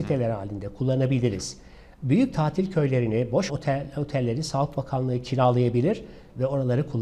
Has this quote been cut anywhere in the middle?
yes; 1 cut; at 3.5 s

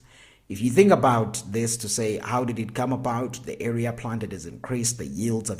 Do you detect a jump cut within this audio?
no; 0 cuts

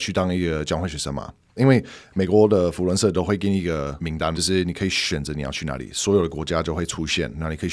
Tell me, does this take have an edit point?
no; 0 cuts

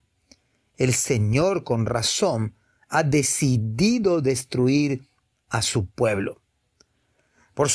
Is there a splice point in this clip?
no; 0 cuts

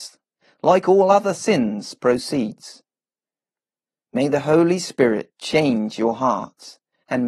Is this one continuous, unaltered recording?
yes; 0 cuts

